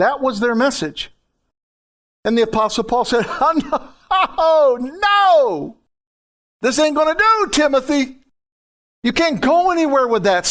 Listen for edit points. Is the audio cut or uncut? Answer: uncut